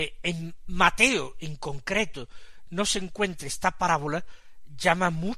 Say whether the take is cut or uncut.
uncut